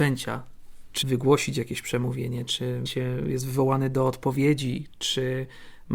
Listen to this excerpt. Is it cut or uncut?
cut